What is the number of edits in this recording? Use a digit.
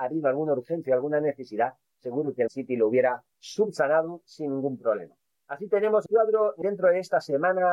5